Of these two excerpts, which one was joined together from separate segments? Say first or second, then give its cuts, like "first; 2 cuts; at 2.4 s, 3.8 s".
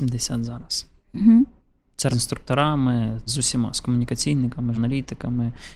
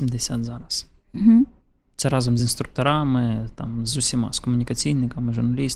first; 3 cuts; at 2.1 s, 3.3 s, 4.7 s